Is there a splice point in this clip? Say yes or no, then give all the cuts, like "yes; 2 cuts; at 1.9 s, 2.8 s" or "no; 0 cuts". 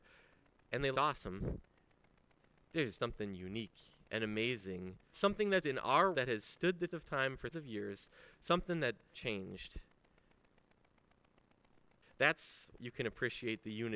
yes; 9 cuts; at 0.9 s, 3.0 s, 5.1 s, 5.6 s, 6.1 s, 6.9 s, 7.5 s, 9.1 s, 12.8 s